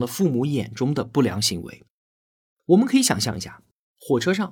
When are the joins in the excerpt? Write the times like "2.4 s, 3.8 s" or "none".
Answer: none